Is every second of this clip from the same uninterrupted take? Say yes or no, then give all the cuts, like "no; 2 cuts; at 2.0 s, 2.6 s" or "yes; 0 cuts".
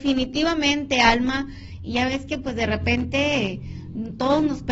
yes; 0 cuts